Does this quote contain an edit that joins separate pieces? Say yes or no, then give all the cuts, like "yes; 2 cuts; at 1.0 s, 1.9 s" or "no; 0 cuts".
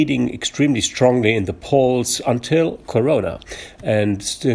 no; 0 cuts